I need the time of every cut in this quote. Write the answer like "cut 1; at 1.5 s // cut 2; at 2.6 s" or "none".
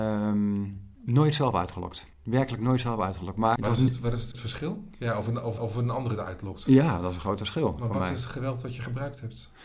cut 1; at 0.9 s // cut 2; at 2.1 s // cut 3; at 3.6 s // cut 4; at 4.3 s // cut 5; at 5.6 s